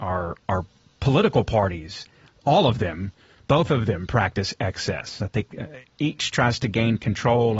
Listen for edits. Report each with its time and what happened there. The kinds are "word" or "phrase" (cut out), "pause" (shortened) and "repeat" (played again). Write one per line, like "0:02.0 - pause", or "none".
none